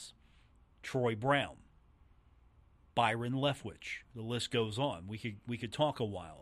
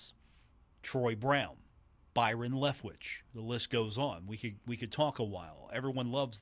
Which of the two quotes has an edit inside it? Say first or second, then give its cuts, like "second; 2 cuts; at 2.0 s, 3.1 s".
second; 1 cut; at 1.7 s